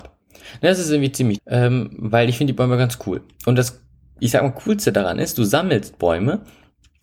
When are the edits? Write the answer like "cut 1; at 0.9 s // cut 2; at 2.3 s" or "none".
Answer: cut 1; at 1.4 s